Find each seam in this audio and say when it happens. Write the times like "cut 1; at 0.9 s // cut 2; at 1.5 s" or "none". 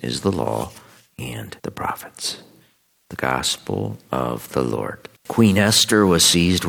cut 1; at 1.6 s // cut 2; at 5.2 s